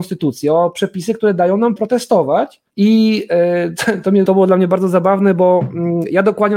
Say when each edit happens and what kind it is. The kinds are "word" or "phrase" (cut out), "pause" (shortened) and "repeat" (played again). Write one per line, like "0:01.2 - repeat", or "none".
0:01.8 - word
0:02.7 - pause
0:04.2 - word